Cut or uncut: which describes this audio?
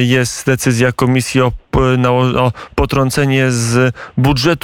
uncut